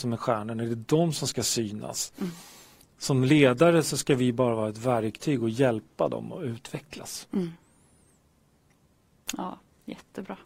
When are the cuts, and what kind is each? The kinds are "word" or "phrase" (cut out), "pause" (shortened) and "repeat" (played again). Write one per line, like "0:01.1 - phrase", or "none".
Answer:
none